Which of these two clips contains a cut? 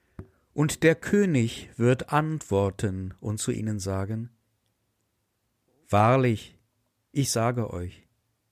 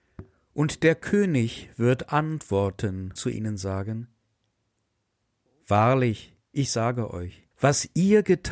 second; 3 cuts; at 3.2 s, 6.4 s, 7.5 s

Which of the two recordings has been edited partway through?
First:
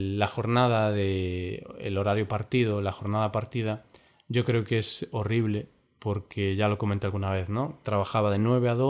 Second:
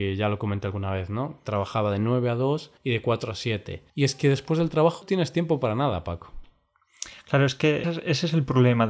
second; 4 cuts; at 2.8 s, 3.9 s, 5.0 s, 7.8 s

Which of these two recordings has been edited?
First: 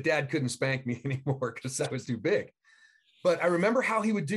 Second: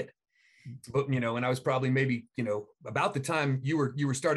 first; 1 cut; at 2.0 s

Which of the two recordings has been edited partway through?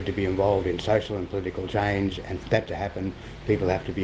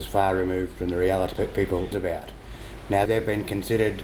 second; 3 cuts; at 1.3 s, 1.9 s, 3.1 s

